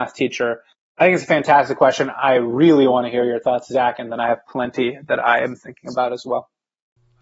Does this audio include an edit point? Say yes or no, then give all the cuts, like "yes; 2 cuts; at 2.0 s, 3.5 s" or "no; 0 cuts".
no; 0 cuts